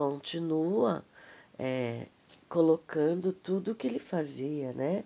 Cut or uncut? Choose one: cut